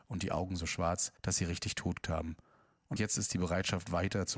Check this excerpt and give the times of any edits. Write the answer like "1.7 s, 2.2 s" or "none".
1.2 s, 2.0 s, 3.0 s